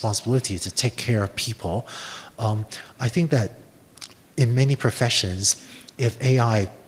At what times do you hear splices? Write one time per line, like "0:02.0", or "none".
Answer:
none

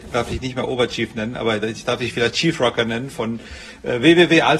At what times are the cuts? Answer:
none

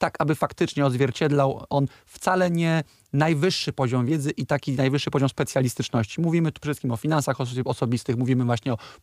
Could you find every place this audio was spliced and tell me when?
none

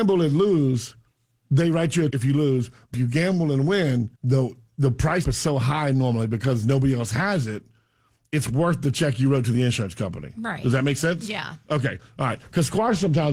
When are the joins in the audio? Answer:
0:01.1
0:02.1
0:02.9
0:04.2
0:05.2

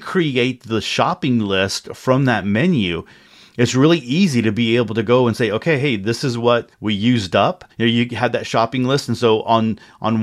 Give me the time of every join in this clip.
0:06.7
0:07.7

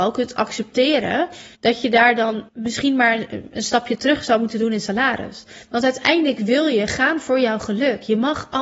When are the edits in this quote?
0:01.5
0:02.5

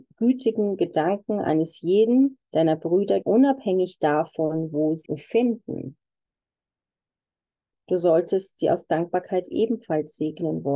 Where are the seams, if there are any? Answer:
0:02.4
0:03.2
0:05.1

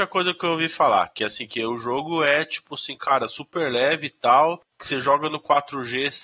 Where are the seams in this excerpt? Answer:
0:04.7

